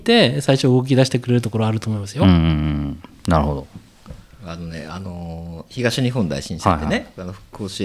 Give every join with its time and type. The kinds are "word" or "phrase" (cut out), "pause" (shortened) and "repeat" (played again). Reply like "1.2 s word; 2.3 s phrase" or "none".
5.7 s pause